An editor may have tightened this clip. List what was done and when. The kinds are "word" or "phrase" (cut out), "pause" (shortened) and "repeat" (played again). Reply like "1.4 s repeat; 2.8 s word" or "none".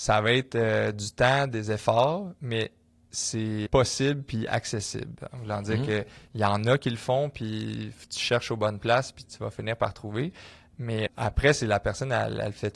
3.7 s word; 9.2 s word; 11.1 s word